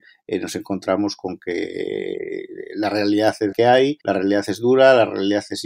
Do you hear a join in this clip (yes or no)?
yes